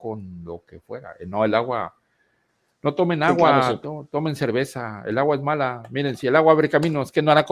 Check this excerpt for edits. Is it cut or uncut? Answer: uncut